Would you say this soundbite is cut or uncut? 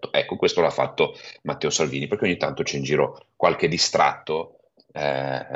uncut